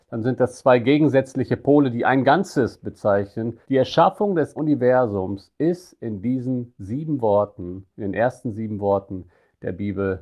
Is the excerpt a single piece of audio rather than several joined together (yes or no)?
no